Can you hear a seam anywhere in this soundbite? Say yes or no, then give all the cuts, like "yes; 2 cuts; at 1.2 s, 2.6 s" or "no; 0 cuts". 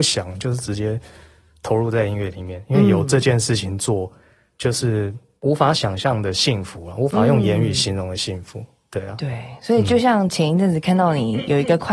no; 0 cuts